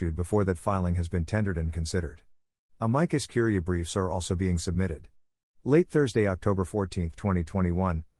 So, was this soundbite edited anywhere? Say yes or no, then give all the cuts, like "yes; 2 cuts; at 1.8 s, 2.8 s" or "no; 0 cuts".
no; 0 cuts